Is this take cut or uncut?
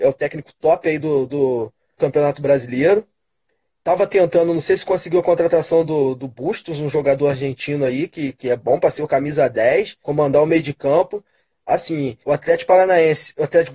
cut